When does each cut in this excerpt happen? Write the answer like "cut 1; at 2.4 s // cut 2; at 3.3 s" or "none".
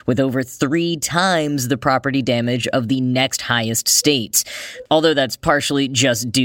none